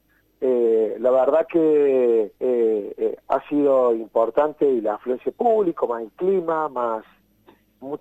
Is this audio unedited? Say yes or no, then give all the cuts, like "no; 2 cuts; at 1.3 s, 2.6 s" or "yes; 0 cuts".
no; 1 cut; at 2.3 s